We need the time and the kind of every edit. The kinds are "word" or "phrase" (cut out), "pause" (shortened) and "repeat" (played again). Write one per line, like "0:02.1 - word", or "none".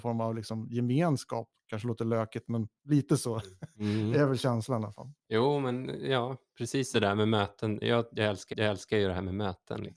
0:02.8 - pause
0:05.2 - pause
0:06.9 - word
0:08.5 - repeat